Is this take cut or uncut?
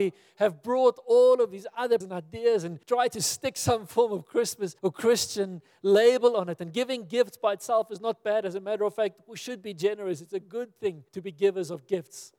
cut